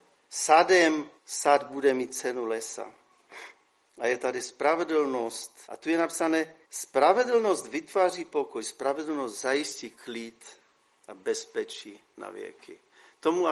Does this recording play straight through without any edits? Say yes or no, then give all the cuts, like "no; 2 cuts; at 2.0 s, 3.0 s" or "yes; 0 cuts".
no; 4 cuts; at 1.2 s, 3.7 s, 5.6 s, 6.6 s